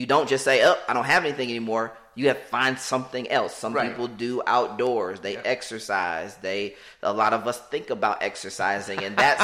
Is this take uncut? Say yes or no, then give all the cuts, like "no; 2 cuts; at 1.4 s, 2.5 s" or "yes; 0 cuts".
yes; 0 cuts